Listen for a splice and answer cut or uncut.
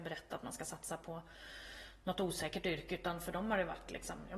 uncut